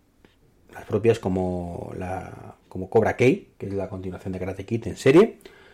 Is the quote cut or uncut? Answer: cut